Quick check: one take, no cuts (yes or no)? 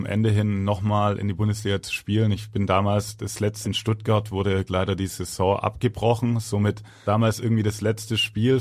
no